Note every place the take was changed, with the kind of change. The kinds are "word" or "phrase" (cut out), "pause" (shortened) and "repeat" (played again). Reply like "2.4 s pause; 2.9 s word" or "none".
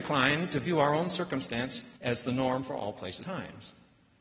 2.0 s pause; 3.2 s word